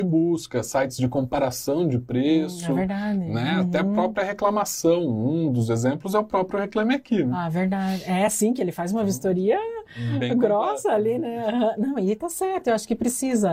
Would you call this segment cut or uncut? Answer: uncut